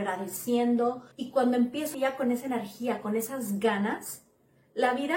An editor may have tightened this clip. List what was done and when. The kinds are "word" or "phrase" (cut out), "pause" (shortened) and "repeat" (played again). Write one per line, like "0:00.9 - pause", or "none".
0:01.1 - pause
0:01.9 - word